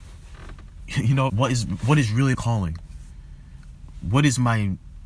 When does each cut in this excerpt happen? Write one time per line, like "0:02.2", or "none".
0:01.3
0:02.3